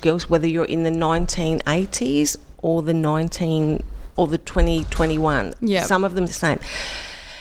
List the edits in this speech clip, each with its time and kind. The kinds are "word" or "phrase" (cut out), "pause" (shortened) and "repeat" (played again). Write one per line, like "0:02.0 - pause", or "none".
0:04.2 - word
0:06.3 - word